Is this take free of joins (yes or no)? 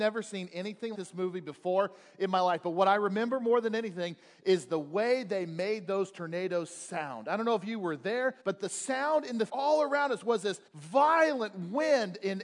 no